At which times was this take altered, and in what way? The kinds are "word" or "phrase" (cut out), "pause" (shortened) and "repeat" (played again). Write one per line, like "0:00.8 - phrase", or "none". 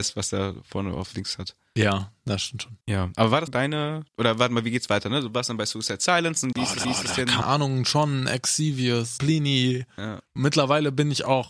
0:01.1 - word
0:02.8 - pause
0:03.5 - word
0:04.1 - pause
0:06.5 - word
0:06.8 - repeat
0:07.4 - phrase
0:09.2 - word
0:10.3 - pause

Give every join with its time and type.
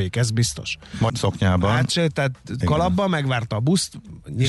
0:01.1 - word
0:02.6 - word

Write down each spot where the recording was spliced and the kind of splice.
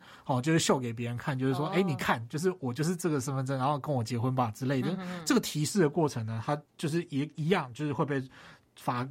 0:06.7 - pause

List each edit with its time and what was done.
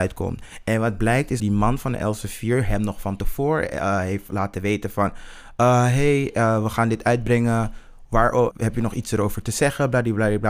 0:01.4 - word
0:08.5 - word

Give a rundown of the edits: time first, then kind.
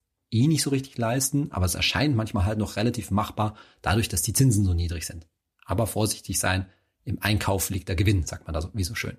none

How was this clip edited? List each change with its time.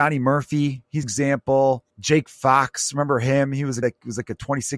0:01.0 - phrase
0:01.9 - pause
0:03.8 - word

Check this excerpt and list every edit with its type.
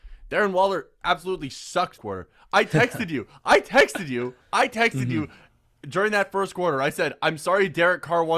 0:02.0 - phrase
0:04.4 - pause

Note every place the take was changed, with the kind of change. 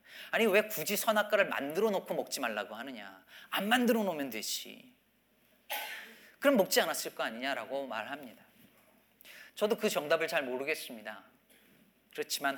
0:09.5 - pause

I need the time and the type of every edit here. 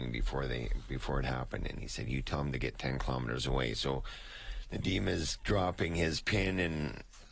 none

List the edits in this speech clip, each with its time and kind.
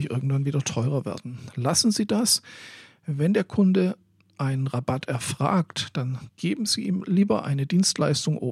none

